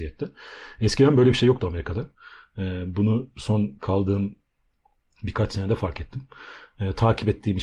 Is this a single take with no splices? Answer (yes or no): yes